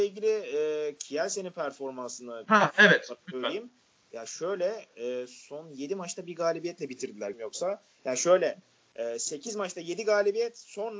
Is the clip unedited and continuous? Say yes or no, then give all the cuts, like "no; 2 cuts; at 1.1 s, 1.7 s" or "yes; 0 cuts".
no; 2 cuts; at 3.2 s, 7.3 s